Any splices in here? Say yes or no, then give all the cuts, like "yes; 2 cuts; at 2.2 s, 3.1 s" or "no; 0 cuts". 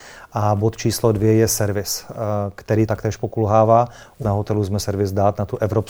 yes; 3 cuts; at 2.9 s, 4.2 s, 4.8 s